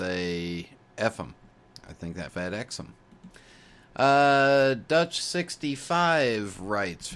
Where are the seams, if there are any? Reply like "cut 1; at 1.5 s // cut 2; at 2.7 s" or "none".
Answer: cut 1; at 2.3 s